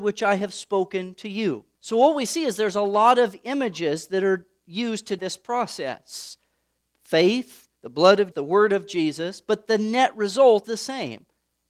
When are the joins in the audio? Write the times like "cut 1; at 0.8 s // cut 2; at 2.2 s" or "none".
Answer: cut 1; at 1.7 s // cut 2; at 5.2 s // cut 3; at 7.8 s // cut 4; at 8.3 s // cut 5; at 10.6 s